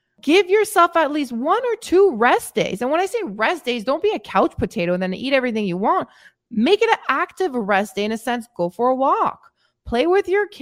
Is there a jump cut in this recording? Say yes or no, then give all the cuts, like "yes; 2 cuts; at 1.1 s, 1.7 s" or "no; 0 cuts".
no; 0 cuts